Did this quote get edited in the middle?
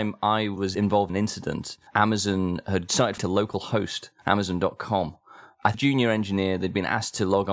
yes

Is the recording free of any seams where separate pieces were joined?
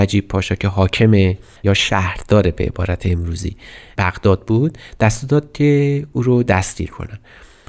yes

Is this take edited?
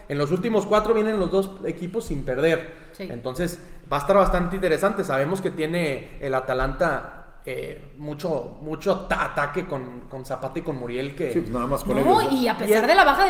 no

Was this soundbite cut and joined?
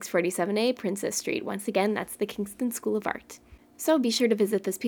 no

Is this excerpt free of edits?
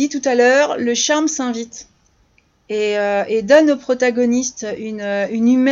yes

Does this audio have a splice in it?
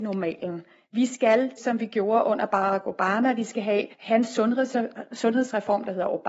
yes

